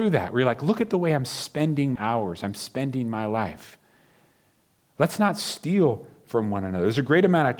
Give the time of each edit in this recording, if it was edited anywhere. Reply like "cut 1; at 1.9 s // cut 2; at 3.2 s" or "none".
cut 1; at 2.0 s